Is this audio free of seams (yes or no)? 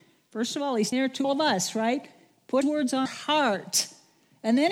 no